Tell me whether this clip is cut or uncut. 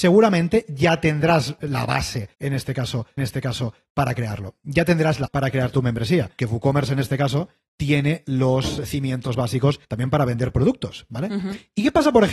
cut